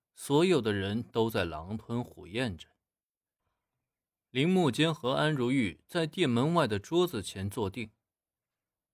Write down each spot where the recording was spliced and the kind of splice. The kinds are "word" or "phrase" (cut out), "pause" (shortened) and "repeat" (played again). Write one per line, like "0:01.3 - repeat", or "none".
none